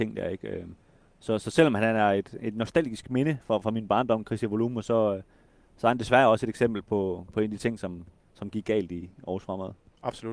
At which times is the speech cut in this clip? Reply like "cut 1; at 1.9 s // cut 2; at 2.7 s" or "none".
none